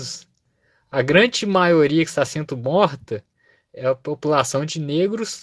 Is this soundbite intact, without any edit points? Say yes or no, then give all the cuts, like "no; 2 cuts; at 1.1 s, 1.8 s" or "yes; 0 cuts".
yes; 0 cuts